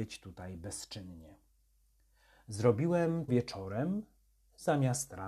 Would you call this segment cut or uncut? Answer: cut